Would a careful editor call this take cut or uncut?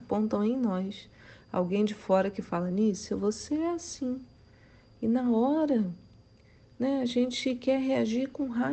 uncut